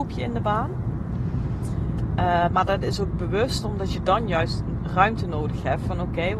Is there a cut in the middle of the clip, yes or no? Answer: no